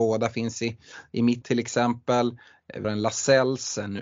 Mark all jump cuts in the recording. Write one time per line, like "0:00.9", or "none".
0:01.4
0:02.8